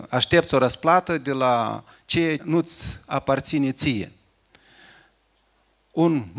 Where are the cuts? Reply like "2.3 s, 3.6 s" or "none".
2.4 s

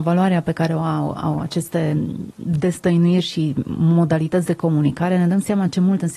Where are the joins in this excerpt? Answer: none

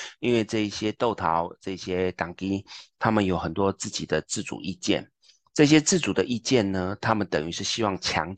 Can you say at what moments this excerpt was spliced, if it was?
none

